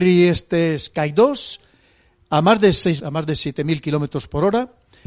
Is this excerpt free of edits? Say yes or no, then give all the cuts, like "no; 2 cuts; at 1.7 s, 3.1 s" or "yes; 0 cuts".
no; 1 cut; at 3.0 s